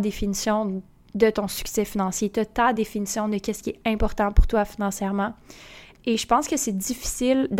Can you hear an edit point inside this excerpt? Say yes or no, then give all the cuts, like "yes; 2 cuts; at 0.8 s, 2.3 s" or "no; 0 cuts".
no; 0 cuts